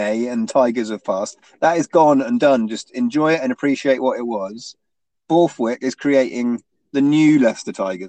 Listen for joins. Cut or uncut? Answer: uncut